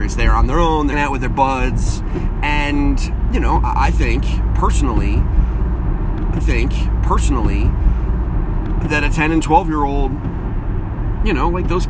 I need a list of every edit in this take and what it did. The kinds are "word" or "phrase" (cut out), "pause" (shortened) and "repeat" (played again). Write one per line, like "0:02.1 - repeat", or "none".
0:00.9 - word
0:06.4 - repeat